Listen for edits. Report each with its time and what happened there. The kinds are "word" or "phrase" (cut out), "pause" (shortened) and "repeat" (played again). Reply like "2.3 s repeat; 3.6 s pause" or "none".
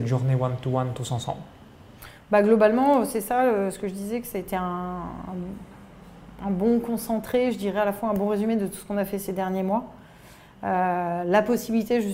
none

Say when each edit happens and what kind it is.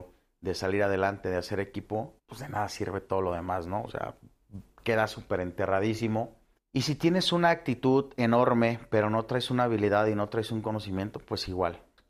2.2 s pause; 6.6 s pause

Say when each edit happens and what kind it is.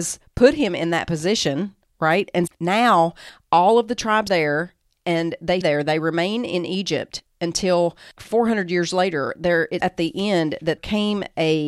2.5 s word; 4.3 s word; 5.6 s word; 8.2 s word; 9.8 s word; 10.8 s word

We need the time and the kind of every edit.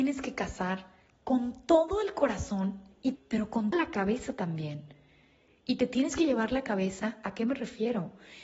3.2 s phrase; 3.7 s word

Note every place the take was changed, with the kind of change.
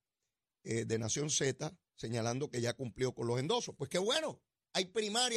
none

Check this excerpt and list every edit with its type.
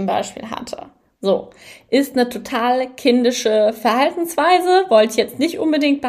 none

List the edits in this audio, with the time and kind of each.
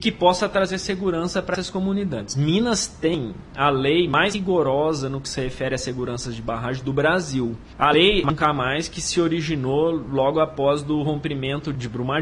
none

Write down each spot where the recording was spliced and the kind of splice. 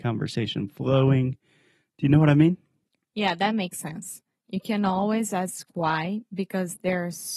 none

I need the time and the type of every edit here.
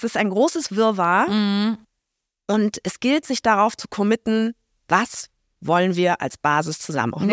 none

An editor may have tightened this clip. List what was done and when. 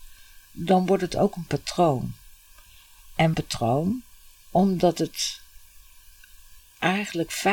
3.3 s phrase

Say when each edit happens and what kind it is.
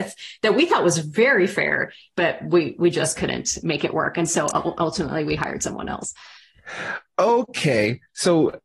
none

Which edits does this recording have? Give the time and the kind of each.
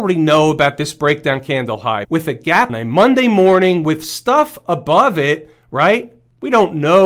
2.0 s phrase; 2.7 s phrase

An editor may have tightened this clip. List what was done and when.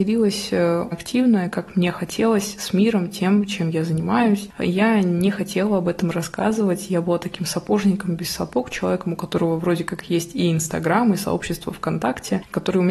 0.9 s word

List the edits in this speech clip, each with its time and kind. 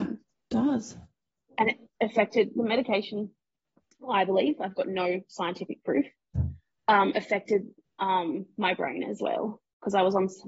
none

